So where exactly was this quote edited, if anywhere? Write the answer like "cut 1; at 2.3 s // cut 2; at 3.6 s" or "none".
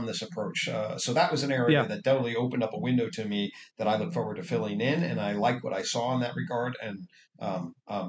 none